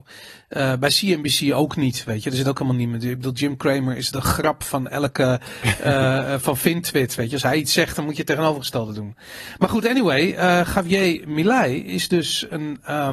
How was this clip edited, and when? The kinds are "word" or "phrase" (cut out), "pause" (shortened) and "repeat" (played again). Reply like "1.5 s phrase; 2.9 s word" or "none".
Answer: 4.1 s word